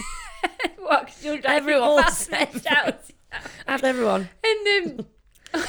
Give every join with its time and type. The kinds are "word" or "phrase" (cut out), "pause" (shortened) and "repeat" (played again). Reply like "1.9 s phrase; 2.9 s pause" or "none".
1.8 s word; 3.8 s word